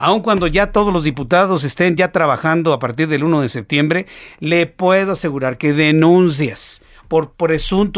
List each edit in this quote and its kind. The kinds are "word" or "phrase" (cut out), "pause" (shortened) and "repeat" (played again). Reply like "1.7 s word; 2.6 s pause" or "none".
none